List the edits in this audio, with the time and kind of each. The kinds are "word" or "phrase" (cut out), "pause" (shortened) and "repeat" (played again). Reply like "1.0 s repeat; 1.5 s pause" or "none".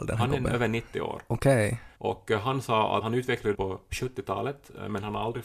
1.9 s pause; 3.0 s word; 3.5 s phrase